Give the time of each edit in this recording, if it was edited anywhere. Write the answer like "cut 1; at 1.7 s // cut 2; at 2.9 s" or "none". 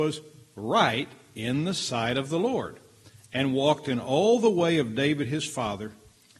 none